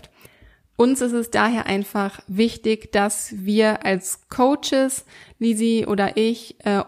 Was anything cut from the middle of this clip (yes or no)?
no